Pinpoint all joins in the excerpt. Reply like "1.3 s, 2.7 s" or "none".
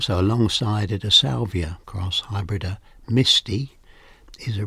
1.8 s